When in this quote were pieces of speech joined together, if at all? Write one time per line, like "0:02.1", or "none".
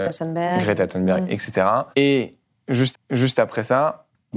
0:01.9
0:02.9